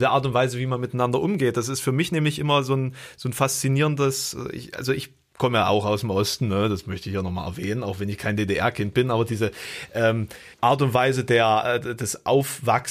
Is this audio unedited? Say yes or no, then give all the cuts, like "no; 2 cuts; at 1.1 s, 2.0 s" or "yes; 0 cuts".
no; 1 cut; at 10.5 s